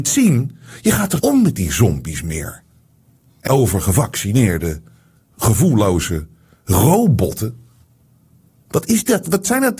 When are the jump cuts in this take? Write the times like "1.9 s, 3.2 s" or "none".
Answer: 1.2 s, 3.5 s